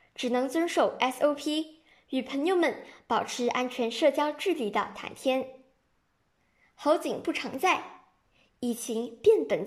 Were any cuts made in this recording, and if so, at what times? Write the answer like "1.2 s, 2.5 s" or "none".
none